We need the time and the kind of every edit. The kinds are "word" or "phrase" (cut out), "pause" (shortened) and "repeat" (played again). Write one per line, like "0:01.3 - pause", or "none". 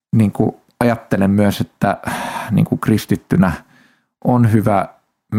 none